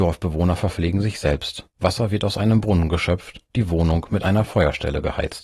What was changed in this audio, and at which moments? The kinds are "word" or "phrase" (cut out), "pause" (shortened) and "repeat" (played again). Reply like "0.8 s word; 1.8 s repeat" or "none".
1.7 s pause; 3.5 s pause